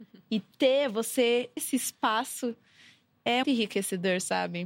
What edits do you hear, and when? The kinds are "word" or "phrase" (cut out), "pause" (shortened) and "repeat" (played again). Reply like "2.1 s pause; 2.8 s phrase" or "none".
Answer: 1.6 s word; 3.4 s word